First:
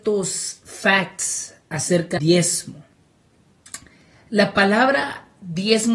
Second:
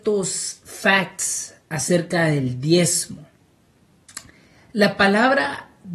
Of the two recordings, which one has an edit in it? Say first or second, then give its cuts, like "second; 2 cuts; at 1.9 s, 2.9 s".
first; 1 cut; at 2.2 s